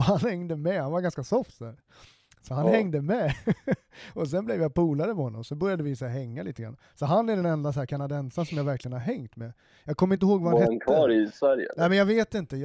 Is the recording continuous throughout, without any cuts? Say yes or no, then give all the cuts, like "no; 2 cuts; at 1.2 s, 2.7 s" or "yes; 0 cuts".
yes; 0 cuts